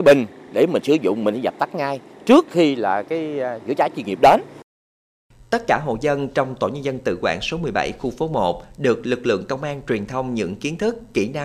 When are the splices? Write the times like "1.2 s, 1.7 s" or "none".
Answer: none